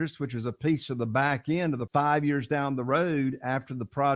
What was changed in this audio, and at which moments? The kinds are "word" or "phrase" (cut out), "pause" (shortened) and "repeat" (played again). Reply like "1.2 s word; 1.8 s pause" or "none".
1.9 s word